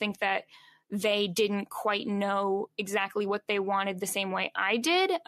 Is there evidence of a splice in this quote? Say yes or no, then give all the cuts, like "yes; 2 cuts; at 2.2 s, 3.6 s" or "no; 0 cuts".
no; 0 cuts